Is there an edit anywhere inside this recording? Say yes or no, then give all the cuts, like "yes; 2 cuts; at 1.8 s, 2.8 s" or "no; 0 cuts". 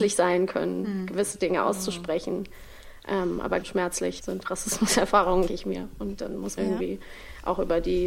yes; 4 cuts; at 3.6 s, 4.2 s, 5.5 s, 6.6 s